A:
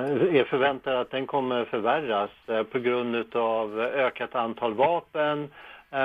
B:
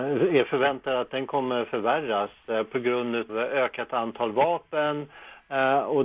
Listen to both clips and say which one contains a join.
B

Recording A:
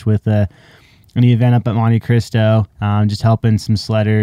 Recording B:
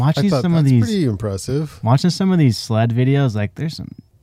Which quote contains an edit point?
A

